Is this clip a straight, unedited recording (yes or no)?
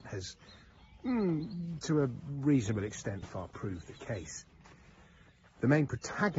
no